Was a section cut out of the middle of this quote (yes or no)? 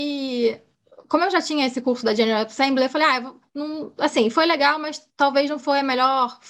yes